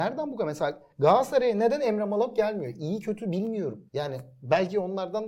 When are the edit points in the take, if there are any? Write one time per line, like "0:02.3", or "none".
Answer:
0:03.9